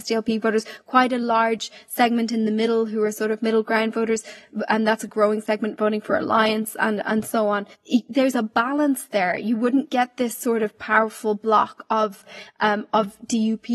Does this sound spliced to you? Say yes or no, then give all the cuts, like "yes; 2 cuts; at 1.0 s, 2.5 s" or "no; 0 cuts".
no; 0 cuts